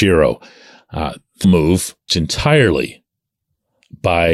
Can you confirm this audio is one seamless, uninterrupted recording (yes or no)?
no